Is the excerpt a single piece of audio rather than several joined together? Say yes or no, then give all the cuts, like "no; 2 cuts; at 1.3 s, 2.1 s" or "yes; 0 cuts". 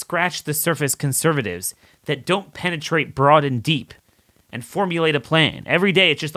yes; 0 cuts